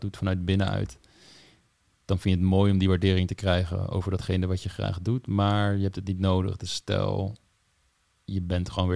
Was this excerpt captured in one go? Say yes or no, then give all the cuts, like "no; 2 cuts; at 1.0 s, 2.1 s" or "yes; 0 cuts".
yes; 0 cuts